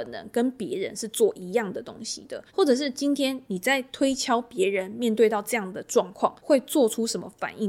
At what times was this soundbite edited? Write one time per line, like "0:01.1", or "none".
0:02.5
0:06.4